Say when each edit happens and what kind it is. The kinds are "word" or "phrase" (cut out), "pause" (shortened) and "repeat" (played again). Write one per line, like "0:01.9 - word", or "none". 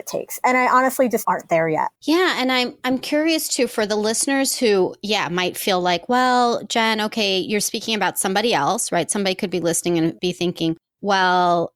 0:01.2 - phrase
0:02.0 - pause